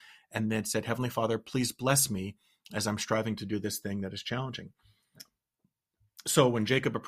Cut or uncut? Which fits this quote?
uncut